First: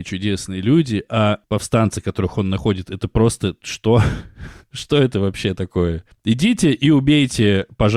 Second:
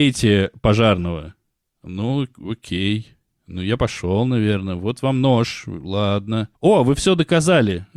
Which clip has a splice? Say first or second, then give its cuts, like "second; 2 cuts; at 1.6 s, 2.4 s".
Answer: first; 1 cut; at 6.1 s